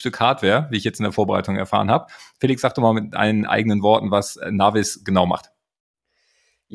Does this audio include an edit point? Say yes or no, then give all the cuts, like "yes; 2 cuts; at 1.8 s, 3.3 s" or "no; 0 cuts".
no; 0 cuts